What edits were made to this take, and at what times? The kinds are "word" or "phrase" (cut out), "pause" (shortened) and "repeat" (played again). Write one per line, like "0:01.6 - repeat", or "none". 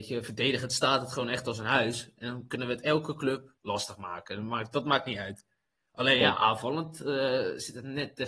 0:03.6 - pause